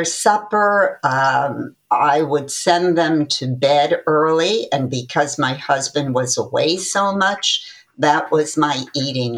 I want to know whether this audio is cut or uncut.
uncut